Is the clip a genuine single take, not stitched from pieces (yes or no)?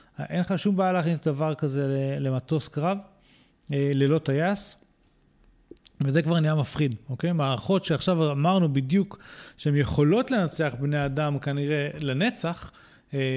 yes